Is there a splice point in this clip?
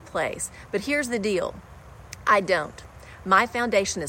no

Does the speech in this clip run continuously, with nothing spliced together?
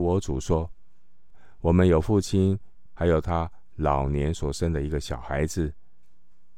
no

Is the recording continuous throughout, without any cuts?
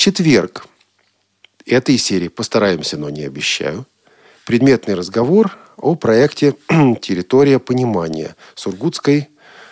yes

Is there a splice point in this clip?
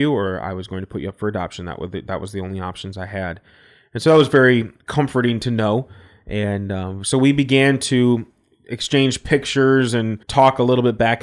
yes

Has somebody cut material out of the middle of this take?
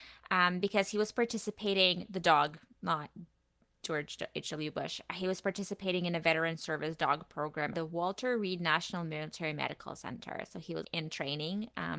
yes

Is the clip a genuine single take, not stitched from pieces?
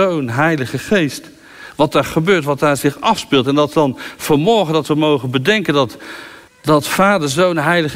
no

